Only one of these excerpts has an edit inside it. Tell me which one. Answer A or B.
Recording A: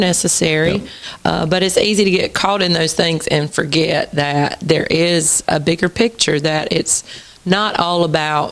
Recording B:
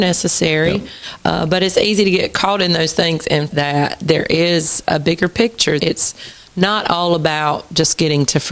B